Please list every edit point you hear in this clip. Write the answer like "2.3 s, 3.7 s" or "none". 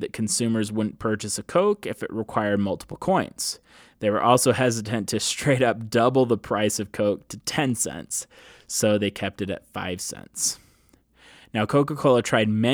none